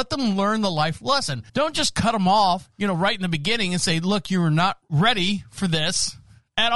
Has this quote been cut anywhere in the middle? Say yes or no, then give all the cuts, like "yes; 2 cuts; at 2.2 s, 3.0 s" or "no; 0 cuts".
yes; 1 cut; at 1.5 s